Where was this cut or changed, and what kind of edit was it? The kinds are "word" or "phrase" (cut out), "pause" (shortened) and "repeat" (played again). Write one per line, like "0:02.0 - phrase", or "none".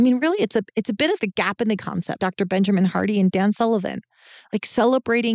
0:01.2 - word
0:01.8 - word
0:02.2 - word

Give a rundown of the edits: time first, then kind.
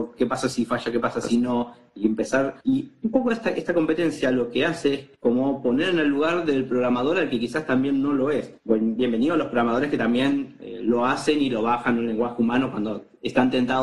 0:02.6 - pause
0:05.1 - pause
0:08.6 - pause

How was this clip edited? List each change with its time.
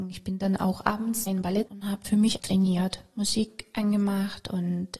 0:01.3 - word
0:01.7 - word
0:02.0 - word
0:02.4 - word

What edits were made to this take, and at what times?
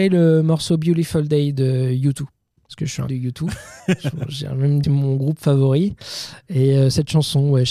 0:02.7 - word
0:03.1 - phrase
0:03.8 - pause
0:04.8 - phrase

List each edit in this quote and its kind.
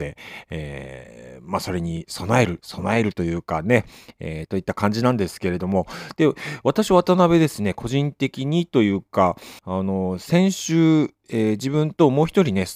0:09.6 - pause

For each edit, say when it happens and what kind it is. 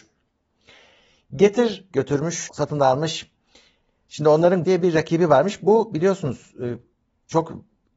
0:01.9 - word
0:02.5 - word
0:04.6 - word

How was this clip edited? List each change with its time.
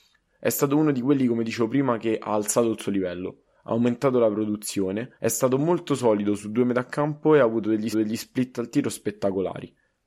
0:05.2 - pause
0:07.9 - repeat

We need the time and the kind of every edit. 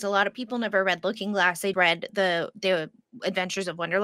0:01.7 - word

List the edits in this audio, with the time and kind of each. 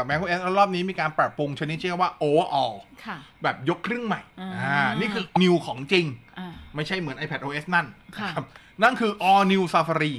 0:04.3 - pause
0:05.4 - word

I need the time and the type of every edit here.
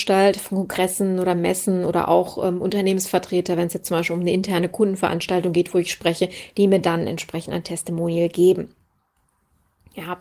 none

